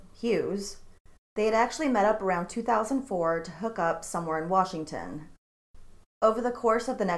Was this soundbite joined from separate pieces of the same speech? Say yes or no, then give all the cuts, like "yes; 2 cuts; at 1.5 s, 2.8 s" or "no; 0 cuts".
no; 0 cuts